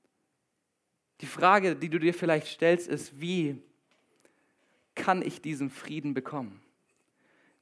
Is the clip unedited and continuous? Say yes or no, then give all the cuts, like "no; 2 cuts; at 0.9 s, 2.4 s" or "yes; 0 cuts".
yes; 0 cuts